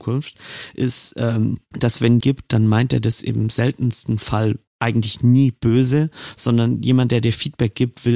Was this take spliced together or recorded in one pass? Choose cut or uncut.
cut